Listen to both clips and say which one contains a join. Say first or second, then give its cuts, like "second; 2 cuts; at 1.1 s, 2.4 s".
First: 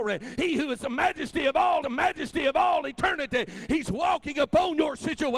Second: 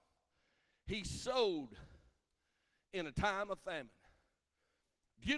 first; 1 cut; at 1.8 s